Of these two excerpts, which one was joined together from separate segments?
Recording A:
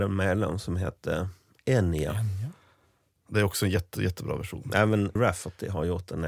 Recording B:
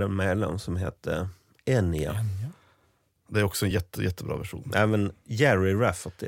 A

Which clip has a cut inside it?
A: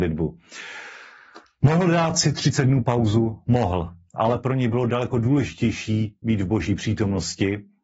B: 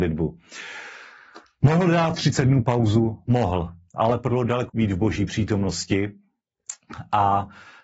B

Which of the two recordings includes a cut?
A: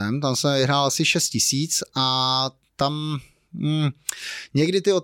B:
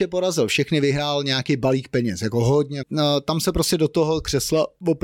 B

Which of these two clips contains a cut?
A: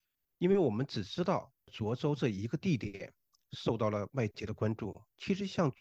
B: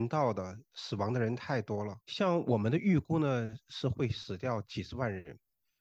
B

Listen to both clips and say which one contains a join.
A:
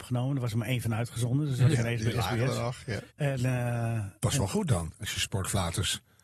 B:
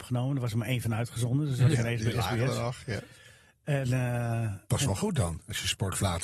A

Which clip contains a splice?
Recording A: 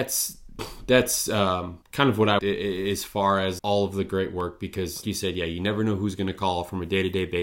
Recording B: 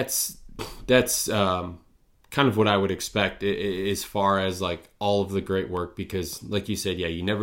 A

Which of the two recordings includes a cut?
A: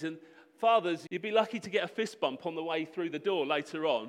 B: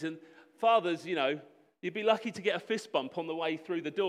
A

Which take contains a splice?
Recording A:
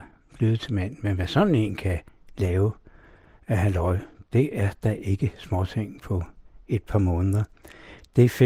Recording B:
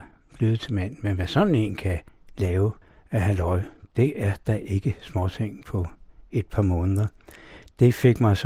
B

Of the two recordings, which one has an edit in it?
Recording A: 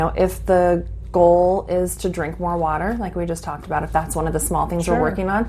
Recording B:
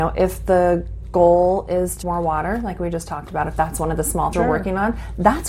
B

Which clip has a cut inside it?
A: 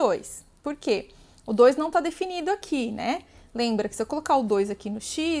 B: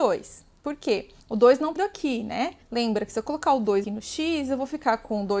B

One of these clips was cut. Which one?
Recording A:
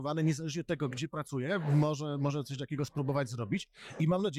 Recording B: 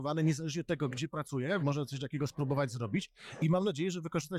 B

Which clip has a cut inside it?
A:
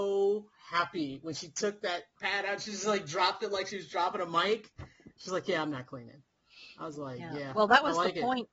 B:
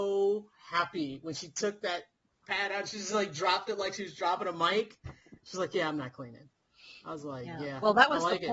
A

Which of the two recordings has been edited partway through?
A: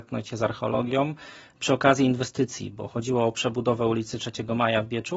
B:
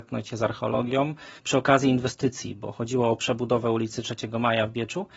B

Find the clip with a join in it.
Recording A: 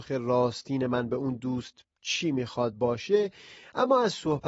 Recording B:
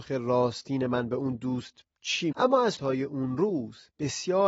B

